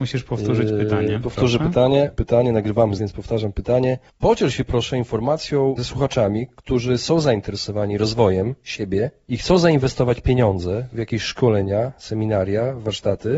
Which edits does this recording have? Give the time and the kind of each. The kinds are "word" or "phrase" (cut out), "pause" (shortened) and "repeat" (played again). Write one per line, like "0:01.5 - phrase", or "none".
0:02.2 - word
0:03.0 - word